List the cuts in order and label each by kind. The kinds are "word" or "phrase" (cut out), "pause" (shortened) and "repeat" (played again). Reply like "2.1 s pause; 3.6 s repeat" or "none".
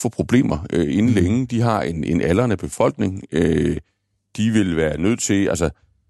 none